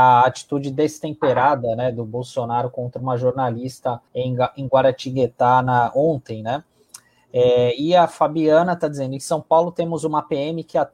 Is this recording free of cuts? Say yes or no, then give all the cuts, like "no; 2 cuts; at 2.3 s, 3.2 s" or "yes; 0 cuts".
no; 1 cut; at 4.1 s